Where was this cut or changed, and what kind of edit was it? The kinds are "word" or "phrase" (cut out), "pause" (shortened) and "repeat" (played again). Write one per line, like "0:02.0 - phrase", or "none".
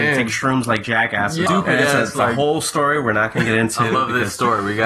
0:01.5 - phrase